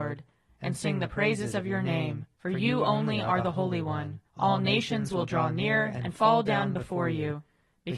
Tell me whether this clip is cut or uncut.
cut